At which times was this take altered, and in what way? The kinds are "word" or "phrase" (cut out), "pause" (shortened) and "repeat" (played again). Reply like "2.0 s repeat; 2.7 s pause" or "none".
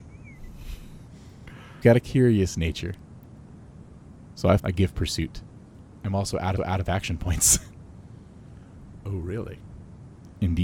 1.8 s phrase; 4.6 s word; 6.6 s repeat